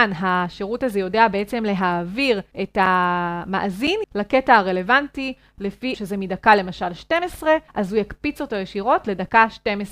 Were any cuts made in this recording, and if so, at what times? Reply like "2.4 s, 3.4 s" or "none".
2.5 s, 4.0 s, 5.9 s, 7.7 s